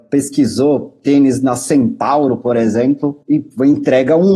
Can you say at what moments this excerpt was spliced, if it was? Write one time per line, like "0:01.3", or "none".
0:03.2